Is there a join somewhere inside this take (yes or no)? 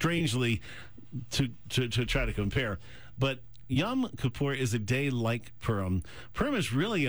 no